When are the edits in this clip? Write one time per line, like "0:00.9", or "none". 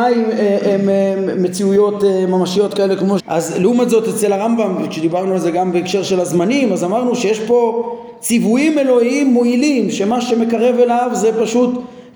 0:03.2